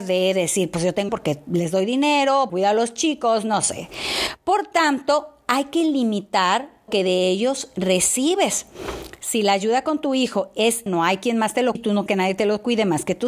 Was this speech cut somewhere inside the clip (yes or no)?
yes